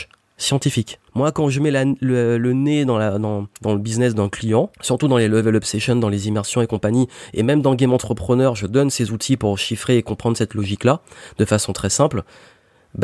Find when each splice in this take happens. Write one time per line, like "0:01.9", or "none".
0:01.1
0:03.5
0:04.7